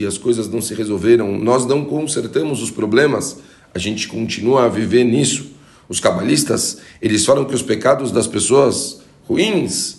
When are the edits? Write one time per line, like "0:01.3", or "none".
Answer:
none